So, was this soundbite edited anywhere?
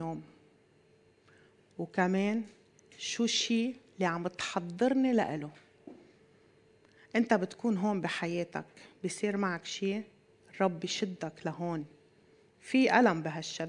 no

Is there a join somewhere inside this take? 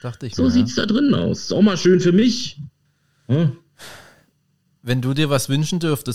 no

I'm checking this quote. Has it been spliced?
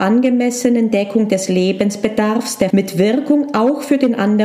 yes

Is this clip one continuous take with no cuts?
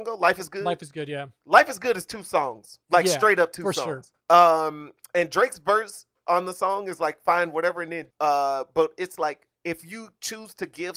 no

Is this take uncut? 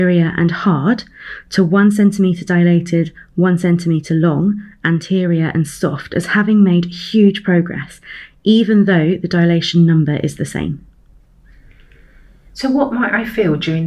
yes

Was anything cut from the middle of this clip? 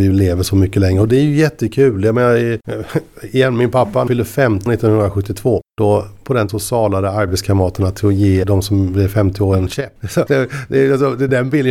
yes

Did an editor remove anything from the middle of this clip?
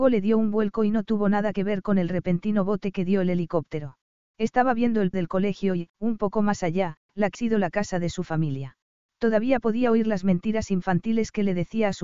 yes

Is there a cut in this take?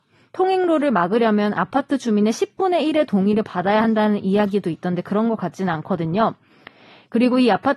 no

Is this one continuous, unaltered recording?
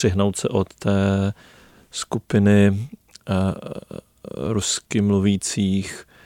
yes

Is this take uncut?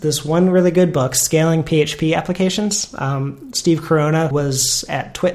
no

